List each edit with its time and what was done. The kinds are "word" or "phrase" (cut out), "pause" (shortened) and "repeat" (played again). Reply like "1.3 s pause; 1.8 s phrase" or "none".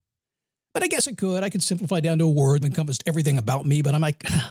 2.6 s phrase